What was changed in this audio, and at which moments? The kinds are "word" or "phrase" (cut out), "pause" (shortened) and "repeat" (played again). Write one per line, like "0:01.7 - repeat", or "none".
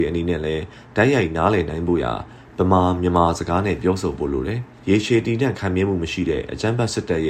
0:04.8 - pause

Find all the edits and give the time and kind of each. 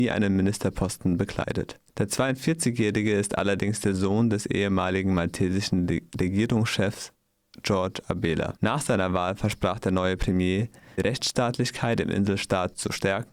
0:01.9 - pause
0:08.6 - pause
0:11.0 - word

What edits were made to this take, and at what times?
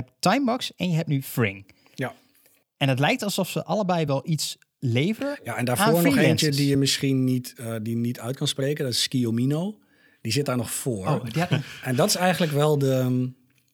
none

